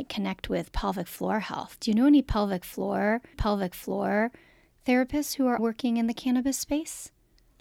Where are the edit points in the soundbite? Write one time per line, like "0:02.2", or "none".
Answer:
0:03.3
0:05.6

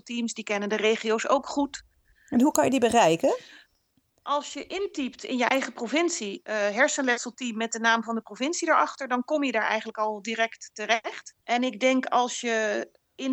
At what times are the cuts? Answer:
0:11.4

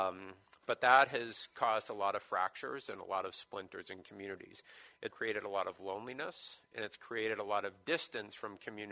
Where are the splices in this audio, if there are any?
0:05.1

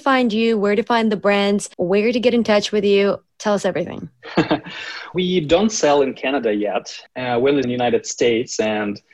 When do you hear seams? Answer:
0:01.7
0:05.1
0:07.1
0:07.6

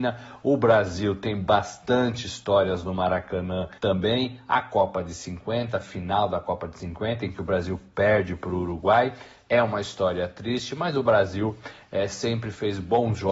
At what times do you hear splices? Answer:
0:03.8

